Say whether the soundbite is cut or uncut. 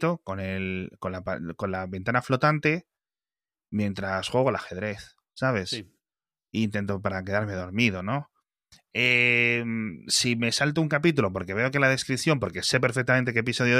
uncut